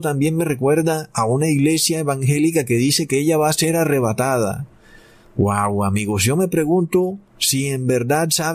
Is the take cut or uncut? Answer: uncut